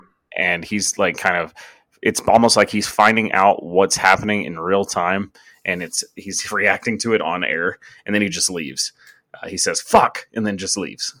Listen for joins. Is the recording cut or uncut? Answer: uncut